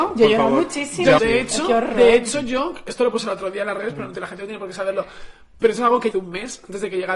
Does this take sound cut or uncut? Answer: cut